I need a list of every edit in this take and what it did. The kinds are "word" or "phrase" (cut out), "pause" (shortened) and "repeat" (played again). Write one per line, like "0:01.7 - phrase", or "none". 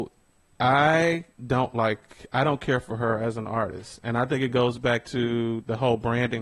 0:01.3 - pause